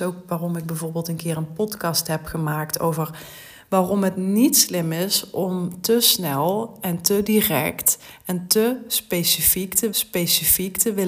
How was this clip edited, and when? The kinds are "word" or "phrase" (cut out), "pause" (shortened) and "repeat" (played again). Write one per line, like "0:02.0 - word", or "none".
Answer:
0:09.9 - repeat